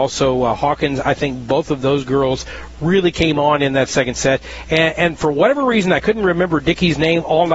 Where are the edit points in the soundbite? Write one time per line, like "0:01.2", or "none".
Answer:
none